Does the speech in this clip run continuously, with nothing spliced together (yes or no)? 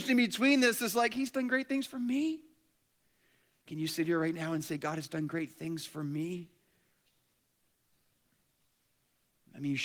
yes